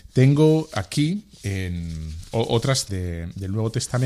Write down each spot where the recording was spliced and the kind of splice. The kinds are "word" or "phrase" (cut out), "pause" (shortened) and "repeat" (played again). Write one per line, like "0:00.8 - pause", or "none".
0:02.9 - word